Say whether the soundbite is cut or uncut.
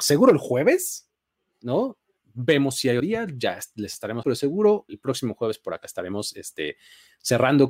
cut